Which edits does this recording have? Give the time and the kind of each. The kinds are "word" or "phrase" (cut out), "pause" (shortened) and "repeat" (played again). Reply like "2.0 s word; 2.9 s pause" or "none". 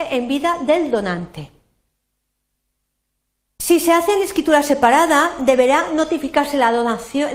none